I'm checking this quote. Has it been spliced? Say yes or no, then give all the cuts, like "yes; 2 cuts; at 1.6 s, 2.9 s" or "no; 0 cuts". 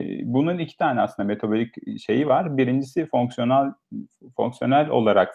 no; 0 cuts